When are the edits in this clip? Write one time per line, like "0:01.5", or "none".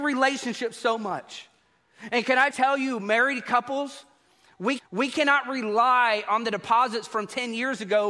0:02.5
0:04.8